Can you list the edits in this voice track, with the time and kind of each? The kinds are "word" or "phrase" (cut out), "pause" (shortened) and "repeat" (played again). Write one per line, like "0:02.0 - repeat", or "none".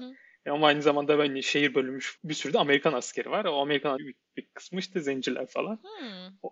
0:02.2 - word
0:04.0 - word